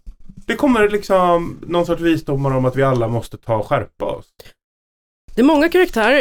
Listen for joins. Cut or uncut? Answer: uncut